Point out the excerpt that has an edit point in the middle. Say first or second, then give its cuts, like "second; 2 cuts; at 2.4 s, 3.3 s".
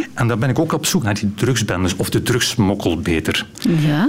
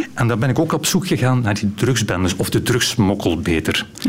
first; 1 cut; at 1.0 s